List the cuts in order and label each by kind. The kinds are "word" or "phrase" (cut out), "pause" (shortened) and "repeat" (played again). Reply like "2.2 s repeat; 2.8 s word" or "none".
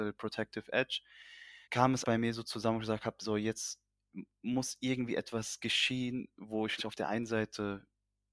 1.6 s pause; 2.0 s word; 6.8 s word

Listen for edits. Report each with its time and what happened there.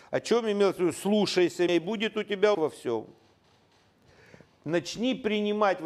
1.7 s word; 2.5 s word

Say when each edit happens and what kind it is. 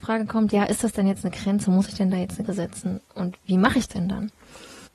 2.5 s word; 3.9 s word

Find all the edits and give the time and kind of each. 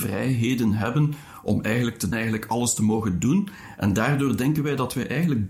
2.1 s phrase

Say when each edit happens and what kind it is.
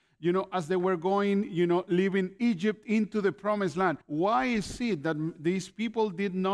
4.0 s pause

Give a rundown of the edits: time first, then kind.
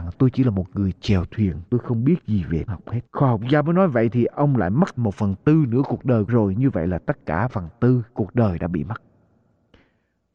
1.7 s pause; 2.7 s word; 3.1 s pause; 5.0 s word; 6.3 s word; 7.5 s word; 8.1 s pause

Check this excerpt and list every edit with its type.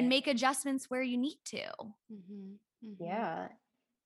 2.0 s pause

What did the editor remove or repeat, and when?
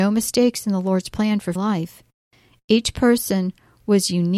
1.6 s word

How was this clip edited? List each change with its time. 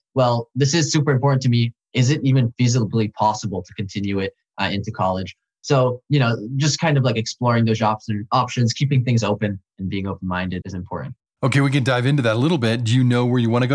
10.6 s word

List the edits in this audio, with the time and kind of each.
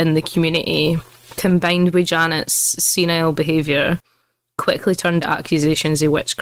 5.2 s word

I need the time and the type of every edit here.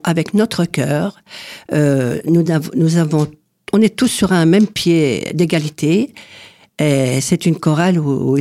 none

